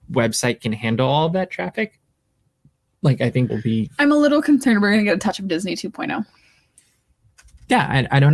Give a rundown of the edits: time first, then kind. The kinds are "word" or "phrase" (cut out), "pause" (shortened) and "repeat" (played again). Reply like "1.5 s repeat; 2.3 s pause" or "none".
3.5 s word